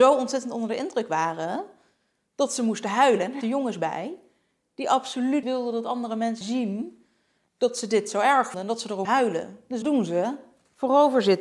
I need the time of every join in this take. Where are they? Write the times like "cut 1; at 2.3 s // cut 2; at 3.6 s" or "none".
cut 1; at 3.4 s // cut 2; at 5.4 s // cut 3; at 6.4 s // cut 4; at 8.5 s // cut 5; at 9.0 s // cut 6; at 9.8 s

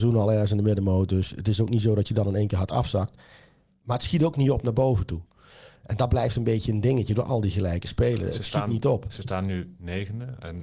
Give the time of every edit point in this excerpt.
none

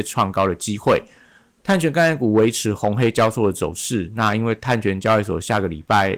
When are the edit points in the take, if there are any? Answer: none

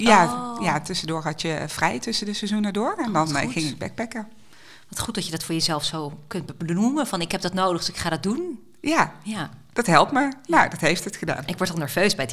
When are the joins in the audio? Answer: none

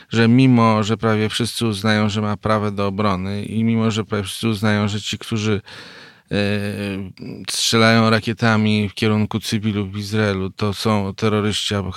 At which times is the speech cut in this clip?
none

